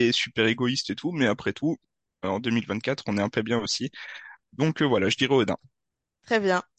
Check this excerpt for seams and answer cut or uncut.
cut